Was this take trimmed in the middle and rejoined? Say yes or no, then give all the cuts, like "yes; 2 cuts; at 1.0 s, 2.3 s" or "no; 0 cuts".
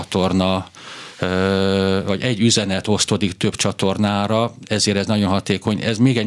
no; 0 cuts